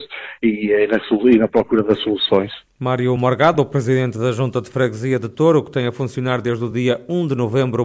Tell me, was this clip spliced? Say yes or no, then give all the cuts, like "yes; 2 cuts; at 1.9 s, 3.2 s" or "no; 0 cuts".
no; 0 cuts